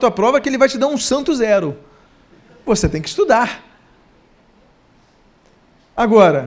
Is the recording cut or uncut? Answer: uncut